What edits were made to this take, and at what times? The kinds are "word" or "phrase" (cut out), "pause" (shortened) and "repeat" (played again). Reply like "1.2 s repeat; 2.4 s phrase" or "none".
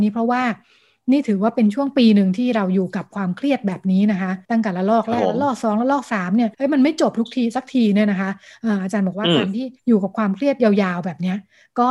4.4 s pause; 6.5 s pause; 9.8 s pause